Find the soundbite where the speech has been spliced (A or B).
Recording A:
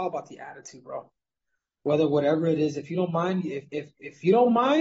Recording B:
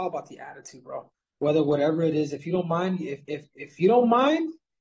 B